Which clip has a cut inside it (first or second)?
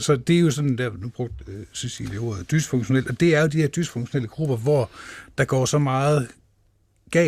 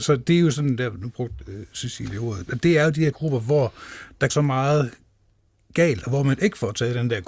second